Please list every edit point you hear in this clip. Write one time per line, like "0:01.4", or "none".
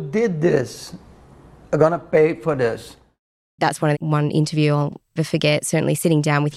0:01.6
0:03.9
0:05.2